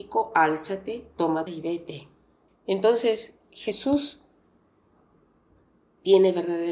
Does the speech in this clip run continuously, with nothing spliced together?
no; 2 cuts; at 1.5 s, 2.5 s

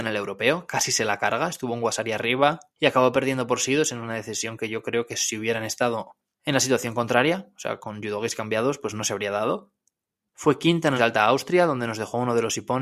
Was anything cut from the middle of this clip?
yes; 3 cuts; at 2.7 s, 6.3 s, 11.0 s

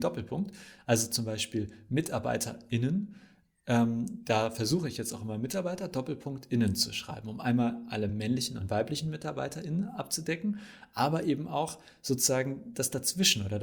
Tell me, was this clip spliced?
no; 0 cuts

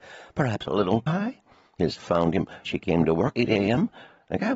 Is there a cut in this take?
yes; 4 cuts; at 1.1 s, 2.0 s, 2.7 s, 3.3 s

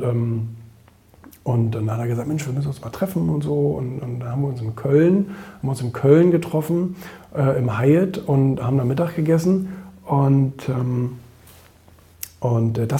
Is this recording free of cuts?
yes; 0 cuts

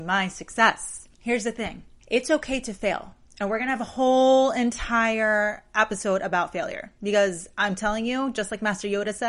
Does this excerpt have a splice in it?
yes; 2 cuts; at 1.1 s, 2.0 s

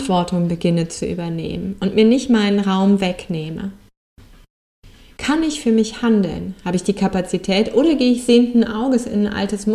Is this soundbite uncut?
yes; 0 cuts

